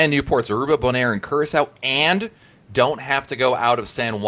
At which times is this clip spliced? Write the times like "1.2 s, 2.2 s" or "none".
none